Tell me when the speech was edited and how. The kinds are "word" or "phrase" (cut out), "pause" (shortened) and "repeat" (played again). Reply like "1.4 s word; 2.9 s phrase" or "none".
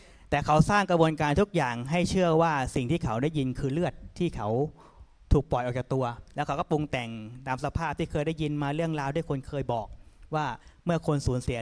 6.3 s pause